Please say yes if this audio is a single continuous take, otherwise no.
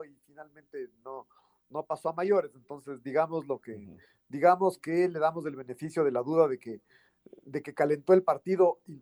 yes